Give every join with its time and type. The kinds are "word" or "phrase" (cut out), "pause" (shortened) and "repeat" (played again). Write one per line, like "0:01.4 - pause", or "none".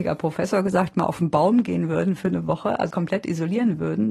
0:02.9 - word